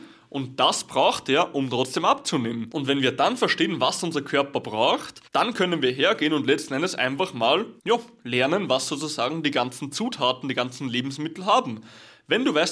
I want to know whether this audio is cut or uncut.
cut